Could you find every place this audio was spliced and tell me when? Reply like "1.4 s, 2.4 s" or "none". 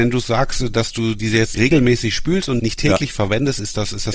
1.5 s, 2.6 s